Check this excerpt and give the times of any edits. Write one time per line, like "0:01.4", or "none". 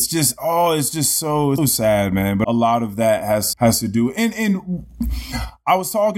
0:01.6
0:02.4
0:03.5